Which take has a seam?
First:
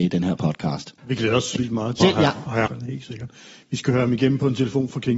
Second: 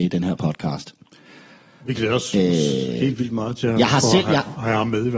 first; 4 cuts; at 1.0 s, 1.6 s, 2.0 s, 2.7 s

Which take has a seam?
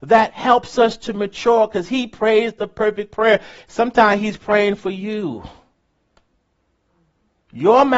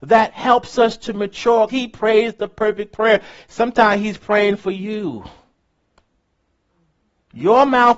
second; 1 cut; at 1.7 s

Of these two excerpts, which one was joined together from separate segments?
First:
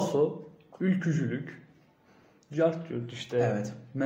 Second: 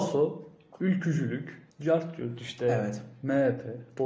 second; 1 cut; at 1.7 s

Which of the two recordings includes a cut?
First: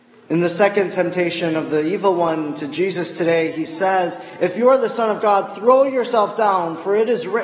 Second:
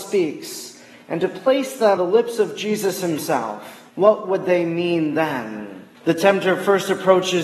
second; 3 cuts; at 2.0 s, 3.9 s, 5.9 s

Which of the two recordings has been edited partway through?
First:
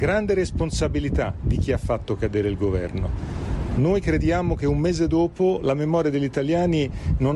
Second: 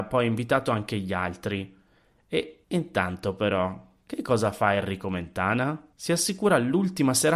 second; 2 cuts; at 2.6 s, 5.9 s

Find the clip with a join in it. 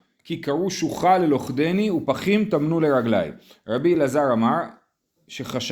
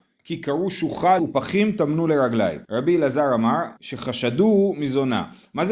second; 3 cuts; at 1.2 s, 2.6 s, 3.8 s

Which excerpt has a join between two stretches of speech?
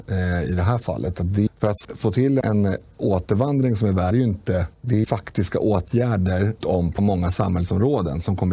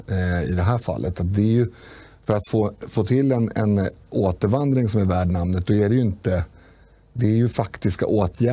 first; 8 cuts; at 1.5 s, 1.8 s, 2.4 s, 4.1 s, 4.7 s, 5.0 s, 6.6 s, 7.0 s

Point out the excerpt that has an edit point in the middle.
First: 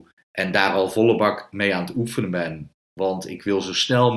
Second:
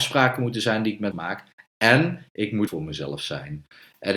second; 2 cuts; at 1.1 s, 2.7 s

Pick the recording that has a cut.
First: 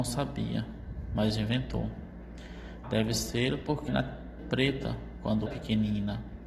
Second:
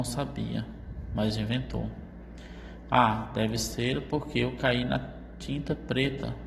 first; 4 cuts; at 2.8 s, 3.9 s, 4.4 s, 5.5 s

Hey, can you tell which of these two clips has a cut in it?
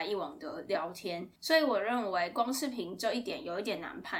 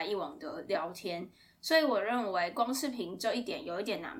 first; 1 cut; at 1.4 s

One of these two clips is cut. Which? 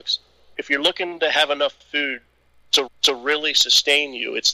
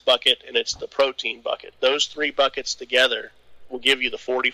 first; 1 cut; at 2.9 s

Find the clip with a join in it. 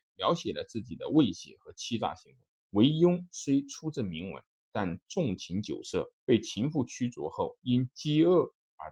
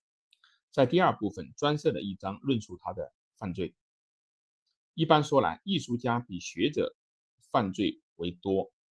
first; 2 cuts; at 2.5 s, 6.2 s

